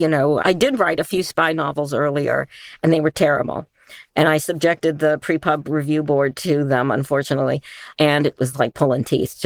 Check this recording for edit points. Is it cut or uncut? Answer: uncut